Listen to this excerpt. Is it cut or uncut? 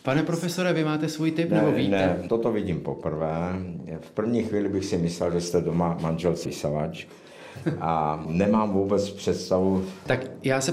cut